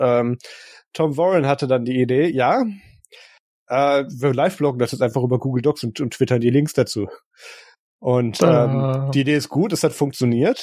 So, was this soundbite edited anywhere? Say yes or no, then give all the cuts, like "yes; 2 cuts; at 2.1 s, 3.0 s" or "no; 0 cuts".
no; 0 cuts